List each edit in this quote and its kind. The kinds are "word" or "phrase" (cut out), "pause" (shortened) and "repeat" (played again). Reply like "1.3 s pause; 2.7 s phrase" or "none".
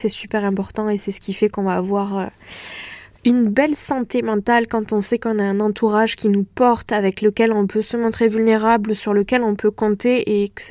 none